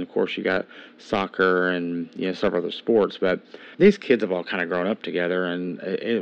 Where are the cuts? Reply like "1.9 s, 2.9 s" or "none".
3.7 s